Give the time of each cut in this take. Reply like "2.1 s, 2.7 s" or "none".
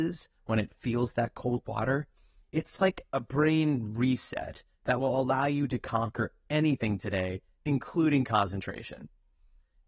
none